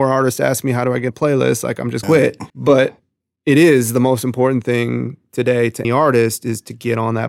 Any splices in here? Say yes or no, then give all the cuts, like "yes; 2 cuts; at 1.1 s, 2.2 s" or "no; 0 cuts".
yes; 4 cuts; at 1.1 s, 2.0 s, 2.5 s, 5.8 s